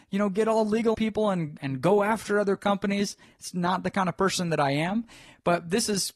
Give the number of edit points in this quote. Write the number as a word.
three